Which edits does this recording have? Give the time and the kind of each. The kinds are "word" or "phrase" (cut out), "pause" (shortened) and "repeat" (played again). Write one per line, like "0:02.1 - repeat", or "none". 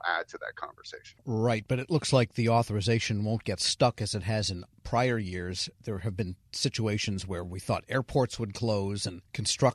none

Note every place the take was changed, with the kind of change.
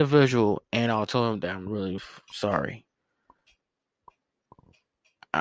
0:01.1 - phrase
0:02.0 - word

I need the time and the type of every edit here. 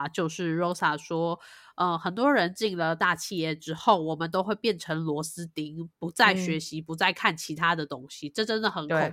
none

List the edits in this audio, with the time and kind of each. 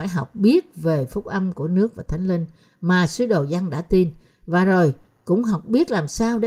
none

